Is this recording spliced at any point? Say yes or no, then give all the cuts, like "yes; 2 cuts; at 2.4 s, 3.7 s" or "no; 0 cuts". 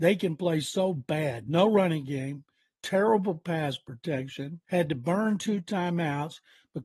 yes; 1 cut; at 4.6 s